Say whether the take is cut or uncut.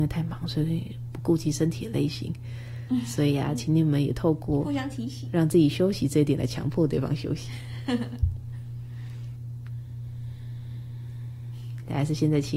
uncut